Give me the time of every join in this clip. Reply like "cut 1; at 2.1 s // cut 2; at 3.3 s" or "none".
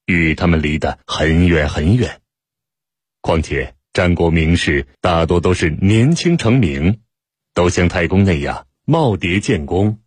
cut 1; at 1.0 s // cut 2; at 3.8 s // cut 3; at 4.9 s